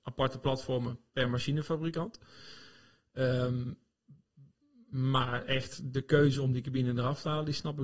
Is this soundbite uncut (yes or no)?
yes